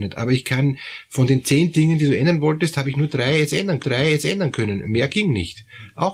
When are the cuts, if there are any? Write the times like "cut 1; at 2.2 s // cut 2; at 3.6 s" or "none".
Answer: cut 1; at 3.8 s